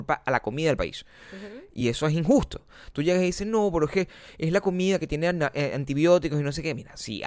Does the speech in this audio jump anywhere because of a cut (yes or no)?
no